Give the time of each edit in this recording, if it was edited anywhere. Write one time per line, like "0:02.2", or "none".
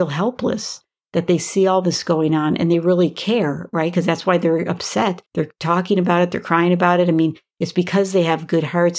0:05.3

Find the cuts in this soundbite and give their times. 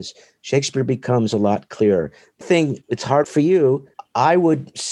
0:02.4
0:03.2

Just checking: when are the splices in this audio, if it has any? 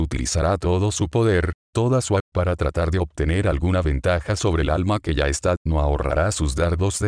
0:02.2
0:05.6

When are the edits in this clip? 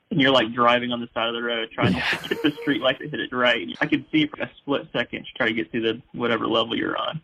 0:03.3
0:03.7
0:04.3

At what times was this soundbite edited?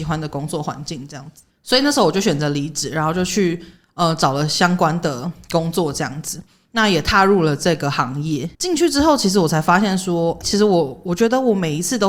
0:08.5
0:10.4

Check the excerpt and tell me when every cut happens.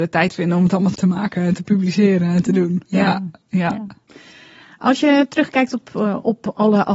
0:00.9

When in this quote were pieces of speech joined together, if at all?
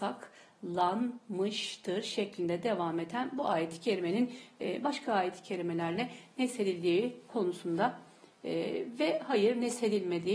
none

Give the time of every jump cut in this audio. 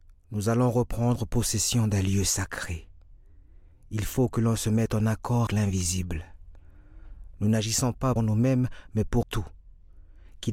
0:05.5
0:08.2
0:09.2

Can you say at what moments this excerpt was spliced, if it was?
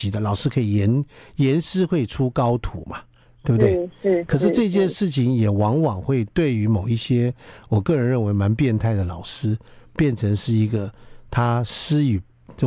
none

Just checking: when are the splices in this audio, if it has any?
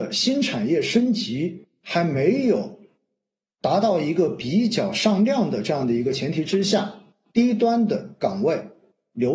none

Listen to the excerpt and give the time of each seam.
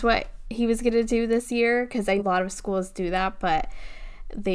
0:02.2

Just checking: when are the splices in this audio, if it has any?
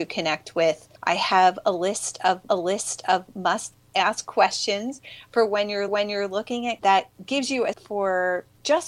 0:01.0
0:02.5
0:05.9
0:06.8
0:07.7

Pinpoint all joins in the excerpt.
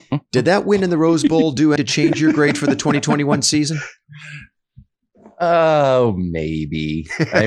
0:01.8

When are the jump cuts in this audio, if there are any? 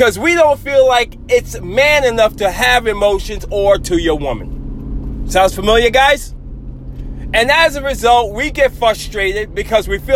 0:03.8

